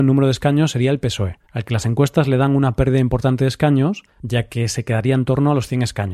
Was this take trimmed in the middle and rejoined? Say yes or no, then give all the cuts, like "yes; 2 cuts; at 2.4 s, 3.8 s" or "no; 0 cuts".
yes; 2 cuts; at 1.4 s, 4.1 s